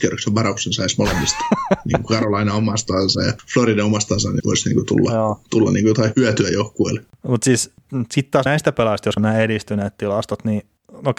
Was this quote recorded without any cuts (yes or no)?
no